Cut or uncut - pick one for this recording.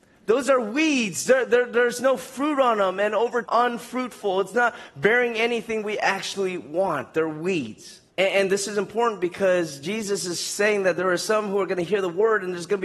cut